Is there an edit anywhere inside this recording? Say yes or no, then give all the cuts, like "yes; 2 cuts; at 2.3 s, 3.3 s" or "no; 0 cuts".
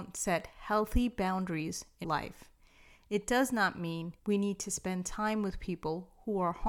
yes; 2 cuts; at 2.0 s, 4.2 s